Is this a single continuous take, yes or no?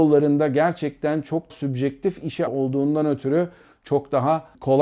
no